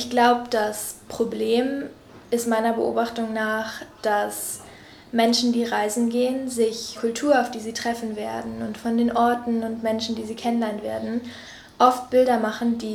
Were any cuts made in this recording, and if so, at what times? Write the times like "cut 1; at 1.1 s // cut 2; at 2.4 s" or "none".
cut 1; at 6.9 s